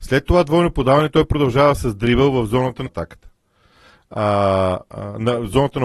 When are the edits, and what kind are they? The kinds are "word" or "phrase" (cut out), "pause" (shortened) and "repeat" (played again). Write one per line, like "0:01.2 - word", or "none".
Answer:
0:02.9 - phrase